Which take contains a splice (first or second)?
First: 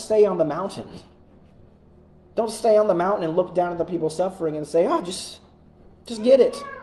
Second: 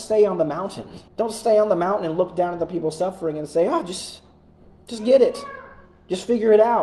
second